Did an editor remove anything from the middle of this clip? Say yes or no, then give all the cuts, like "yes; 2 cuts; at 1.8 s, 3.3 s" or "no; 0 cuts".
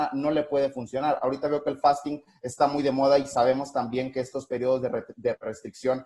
no; 0 cuts